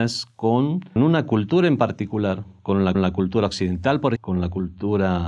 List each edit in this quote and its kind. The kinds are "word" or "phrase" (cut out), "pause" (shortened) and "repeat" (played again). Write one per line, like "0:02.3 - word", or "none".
0:01.0 - word
0:02.9 - repeat
0:04.2 - word